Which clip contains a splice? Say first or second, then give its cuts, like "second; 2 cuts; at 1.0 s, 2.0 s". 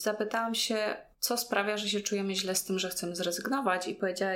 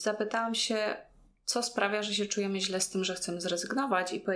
first; 1 cut; at 1.1 s